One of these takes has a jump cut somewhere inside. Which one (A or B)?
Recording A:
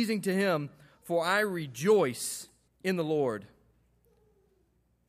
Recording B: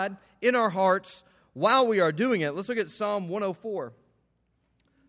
A